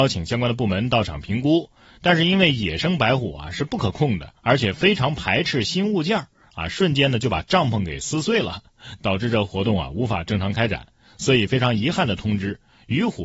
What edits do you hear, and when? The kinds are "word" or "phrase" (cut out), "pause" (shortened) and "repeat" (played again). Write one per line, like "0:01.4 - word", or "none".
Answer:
0:04.4 - pause